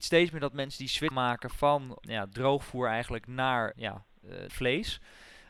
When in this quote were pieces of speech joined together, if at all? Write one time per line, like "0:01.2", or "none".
0:01.1
0:02.0
0:03.7
0:04.5